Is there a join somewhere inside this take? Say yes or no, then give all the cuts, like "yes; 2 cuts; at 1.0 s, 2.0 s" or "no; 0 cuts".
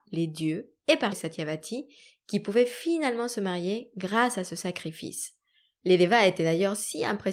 yes; 1 cut; at 1.1 s